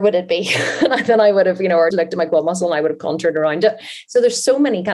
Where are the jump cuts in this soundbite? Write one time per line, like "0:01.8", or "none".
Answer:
0:01.9